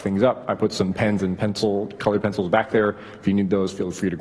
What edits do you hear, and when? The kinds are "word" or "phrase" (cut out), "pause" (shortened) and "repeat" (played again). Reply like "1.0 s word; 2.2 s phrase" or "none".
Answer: none